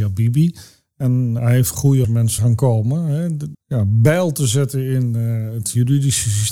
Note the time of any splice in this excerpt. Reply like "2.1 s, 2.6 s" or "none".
1.4 s, 2.0 s, 2.4 s, 3.5 s